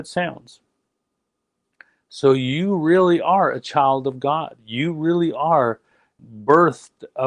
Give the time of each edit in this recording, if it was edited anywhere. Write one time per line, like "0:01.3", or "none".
none